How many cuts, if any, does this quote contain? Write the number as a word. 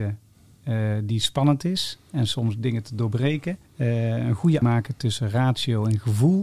two